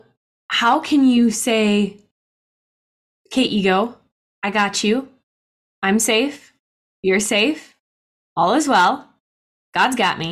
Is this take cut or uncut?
uncut